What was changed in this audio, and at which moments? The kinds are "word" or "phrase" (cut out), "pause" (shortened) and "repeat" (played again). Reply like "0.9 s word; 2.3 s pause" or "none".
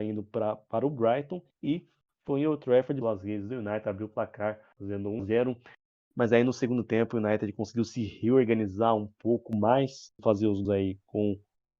1.5 s pause; 3.0 s word; 5.2 s word; 10.2 s phrase; 10.6 s word